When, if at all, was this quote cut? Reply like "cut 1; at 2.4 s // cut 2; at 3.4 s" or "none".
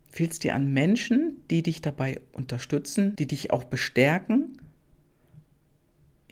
cut 1; at 3.2 s